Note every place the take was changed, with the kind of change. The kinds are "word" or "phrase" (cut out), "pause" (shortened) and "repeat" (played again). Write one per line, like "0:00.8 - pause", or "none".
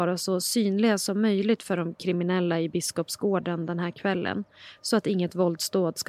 none